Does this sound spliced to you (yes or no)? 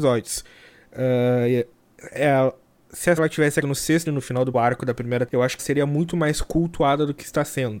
yes